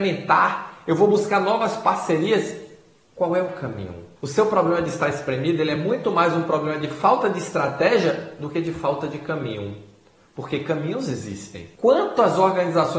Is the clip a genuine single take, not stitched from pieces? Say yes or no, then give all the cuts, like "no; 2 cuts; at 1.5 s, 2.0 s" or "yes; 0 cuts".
yes; 0 cuts